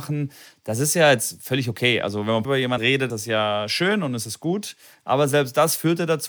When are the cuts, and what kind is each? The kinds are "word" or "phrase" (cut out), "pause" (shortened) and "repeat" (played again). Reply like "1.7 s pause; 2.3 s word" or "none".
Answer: 2.4 s word; 2.8 s word; 3.1 s word